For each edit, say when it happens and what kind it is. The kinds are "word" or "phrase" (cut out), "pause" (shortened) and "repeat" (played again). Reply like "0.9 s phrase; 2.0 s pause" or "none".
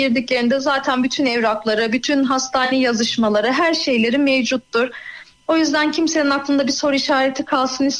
none